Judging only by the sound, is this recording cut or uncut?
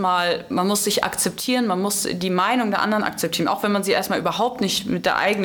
uncut